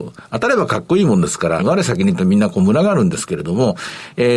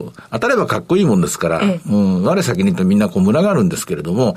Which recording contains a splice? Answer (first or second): first